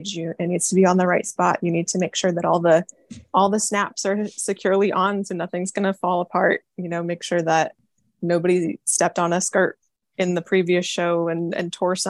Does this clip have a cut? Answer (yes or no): no